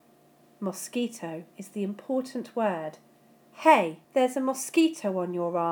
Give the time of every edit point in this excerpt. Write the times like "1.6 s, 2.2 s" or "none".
4.0 s